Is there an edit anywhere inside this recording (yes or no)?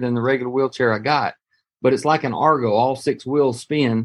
no